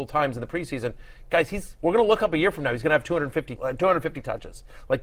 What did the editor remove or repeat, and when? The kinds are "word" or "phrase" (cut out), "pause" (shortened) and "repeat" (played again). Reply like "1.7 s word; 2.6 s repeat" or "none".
3.6 s word